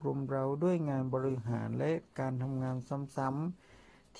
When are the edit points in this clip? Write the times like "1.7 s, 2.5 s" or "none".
none